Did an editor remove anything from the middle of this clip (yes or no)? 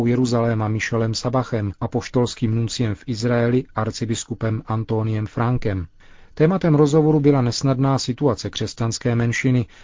no